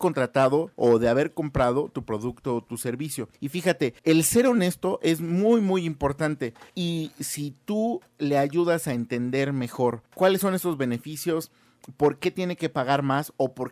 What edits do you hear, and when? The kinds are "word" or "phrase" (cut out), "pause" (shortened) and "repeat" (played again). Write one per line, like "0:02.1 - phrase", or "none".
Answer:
0:03.3 - pause
0:04.0 - pause
0:06.7 - pause
0:10.1 - pause